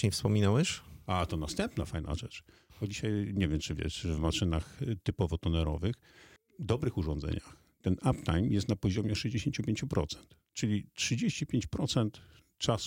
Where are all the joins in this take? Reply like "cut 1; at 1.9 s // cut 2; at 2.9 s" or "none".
none